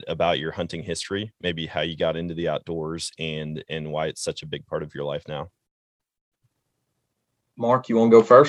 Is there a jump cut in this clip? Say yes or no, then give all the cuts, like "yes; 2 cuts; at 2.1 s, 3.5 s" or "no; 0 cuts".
no; 0 cuts